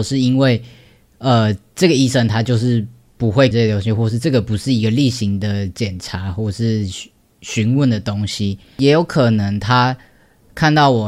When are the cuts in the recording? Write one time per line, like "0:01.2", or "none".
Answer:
0:03.5